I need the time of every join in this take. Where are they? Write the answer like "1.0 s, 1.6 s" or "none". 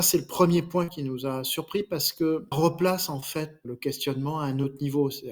2.5 s, 3.6 s